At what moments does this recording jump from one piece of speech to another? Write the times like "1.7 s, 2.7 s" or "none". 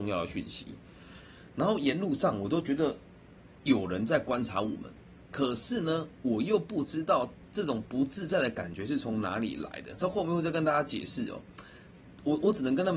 none